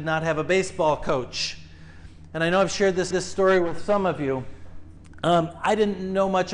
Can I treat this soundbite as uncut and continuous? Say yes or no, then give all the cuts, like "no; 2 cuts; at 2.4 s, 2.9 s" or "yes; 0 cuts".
no; 1 cut; at 3.1 s